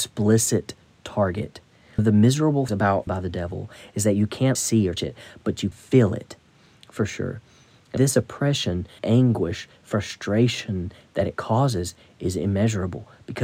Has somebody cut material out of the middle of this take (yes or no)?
yes